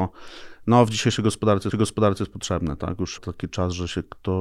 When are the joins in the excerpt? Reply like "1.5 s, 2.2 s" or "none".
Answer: 1.7 s, 3.2 s